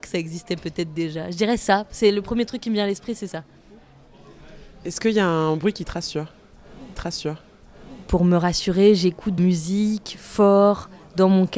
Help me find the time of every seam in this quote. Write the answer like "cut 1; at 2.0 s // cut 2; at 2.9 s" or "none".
cut 1; at 6.9 s // cut 2; at 9.4 s